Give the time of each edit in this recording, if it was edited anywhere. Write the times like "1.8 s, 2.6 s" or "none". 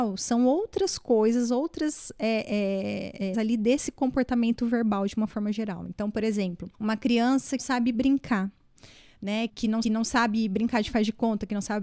3.3 s, 6.7 s, 7.6 s, 9.5 s, 9.8 s